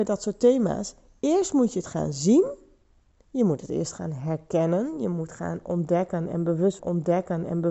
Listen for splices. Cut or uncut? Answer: cut